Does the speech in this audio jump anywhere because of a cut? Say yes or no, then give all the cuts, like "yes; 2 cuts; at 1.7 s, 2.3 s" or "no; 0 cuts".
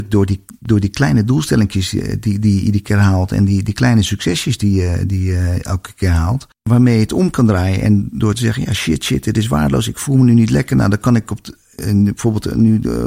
yes; 1 cut; at 6.5 s